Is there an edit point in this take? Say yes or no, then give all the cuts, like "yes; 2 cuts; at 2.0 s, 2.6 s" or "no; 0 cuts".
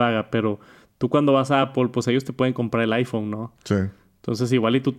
no; 0 cuts